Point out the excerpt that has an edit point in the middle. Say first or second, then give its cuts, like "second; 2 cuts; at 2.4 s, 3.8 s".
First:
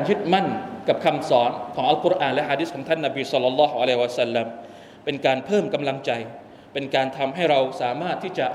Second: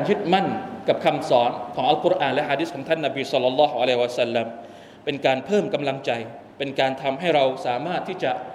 second; 1 cut; at 6.5 s